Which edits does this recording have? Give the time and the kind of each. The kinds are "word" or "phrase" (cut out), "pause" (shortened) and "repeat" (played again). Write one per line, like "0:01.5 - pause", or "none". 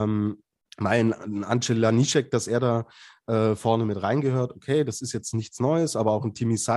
none